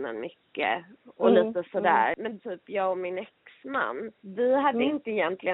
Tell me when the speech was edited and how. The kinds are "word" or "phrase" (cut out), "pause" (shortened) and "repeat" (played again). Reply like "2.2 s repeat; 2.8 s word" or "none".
2.4 s word; 4.1 s pause